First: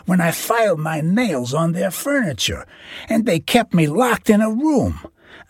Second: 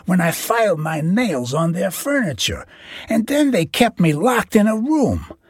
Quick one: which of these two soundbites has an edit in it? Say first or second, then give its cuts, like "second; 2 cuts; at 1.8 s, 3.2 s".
first; 1 cut; at 3.3 s